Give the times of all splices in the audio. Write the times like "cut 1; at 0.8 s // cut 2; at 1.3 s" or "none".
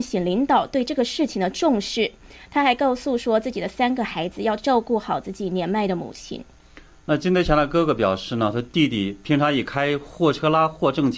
none